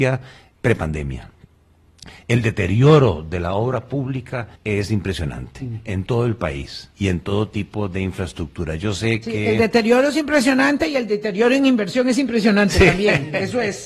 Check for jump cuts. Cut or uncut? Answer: cut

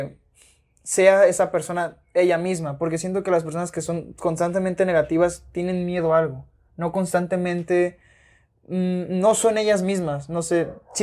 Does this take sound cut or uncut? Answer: uncut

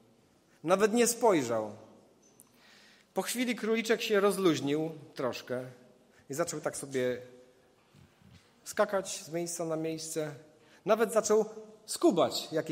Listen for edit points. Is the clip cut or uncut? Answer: uncut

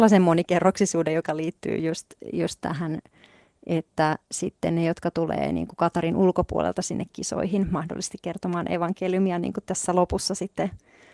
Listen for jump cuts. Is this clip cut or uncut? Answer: uncut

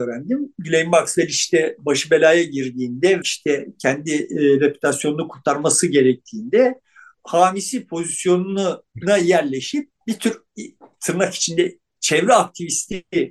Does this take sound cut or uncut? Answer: cut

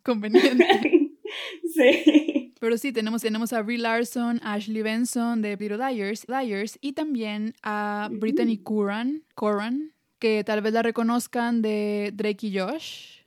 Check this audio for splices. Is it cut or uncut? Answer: cut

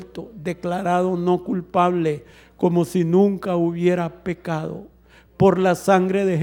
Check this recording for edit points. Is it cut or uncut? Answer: uncut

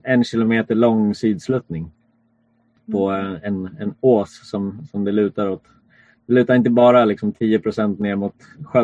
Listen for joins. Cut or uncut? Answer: uncut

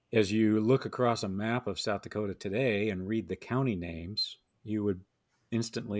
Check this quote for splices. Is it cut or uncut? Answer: uncut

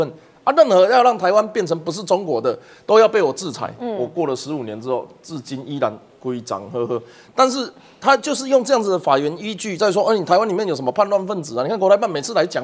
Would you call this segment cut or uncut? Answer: uncut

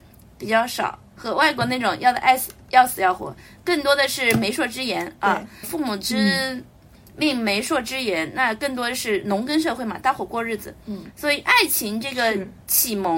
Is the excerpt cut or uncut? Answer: cut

